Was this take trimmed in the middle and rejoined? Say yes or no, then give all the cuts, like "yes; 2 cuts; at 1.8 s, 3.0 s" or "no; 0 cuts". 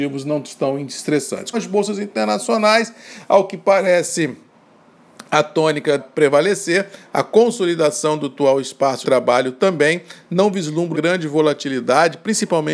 yes; 4 cuts; at 1.5 s, 6.0 s, 9.0 s, 10.9 s